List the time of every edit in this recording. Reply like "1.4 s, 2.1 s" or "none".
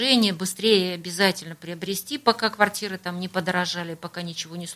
none